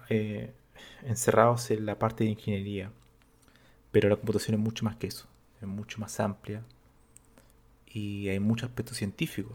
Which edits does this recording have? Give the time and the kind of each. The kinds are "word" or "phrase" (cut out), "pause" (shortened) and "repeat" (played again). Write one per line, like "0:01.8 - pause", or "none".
none